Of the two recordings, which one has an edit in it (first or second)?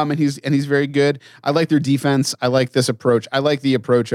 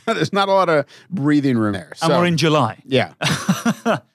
second